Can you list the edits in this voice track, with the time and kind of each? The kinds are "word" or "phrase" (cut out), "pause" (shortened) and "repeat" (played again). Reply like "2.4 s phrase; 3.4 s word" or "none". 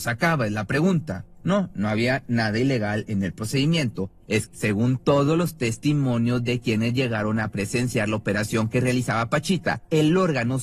4.5 s word